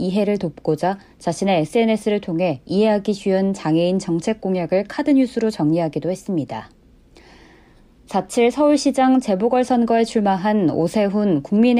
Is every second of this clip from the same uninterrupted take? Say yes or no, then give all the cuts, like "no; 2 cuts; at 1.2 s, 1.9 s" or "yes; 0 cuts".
yes; 0 cuts